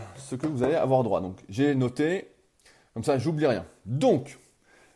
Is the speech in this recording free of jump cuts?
yes; 0 cuts

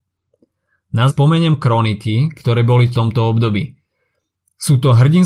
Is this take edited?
yes; 2 cuts; at 1.1 s, 2.9 s

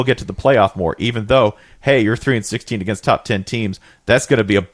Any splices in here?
no; 0 cuts

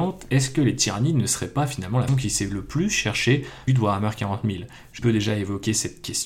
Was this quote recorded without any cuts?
no; 3 cuts; at 2.1 s, 3.7 s, 5.0 s

